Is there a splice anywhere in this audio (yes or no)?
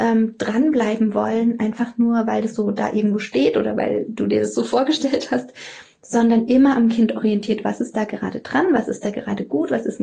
no